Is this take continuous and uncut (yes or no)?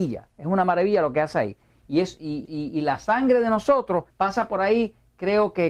no